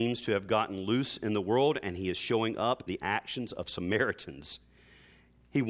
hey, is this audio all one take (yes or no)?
no